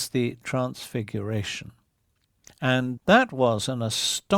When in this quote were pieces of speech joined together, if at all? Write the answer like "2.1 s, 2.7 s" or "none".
3.0 s